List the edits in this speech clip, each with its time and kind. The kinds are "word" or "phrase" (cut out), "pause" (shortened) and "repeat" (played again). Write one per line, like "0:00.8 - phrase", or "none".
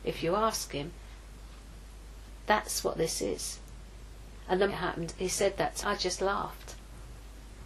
0:04.7 - phrase
0:05.8 - word